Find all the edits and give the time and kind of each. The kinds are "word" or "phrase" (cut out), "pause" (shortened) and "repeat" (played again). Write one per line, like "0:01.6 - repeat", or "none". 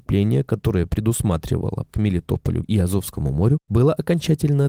0:01.9 - word
0:02.6 - word